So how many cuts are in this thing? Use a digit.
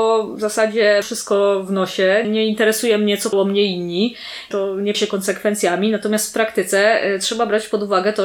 5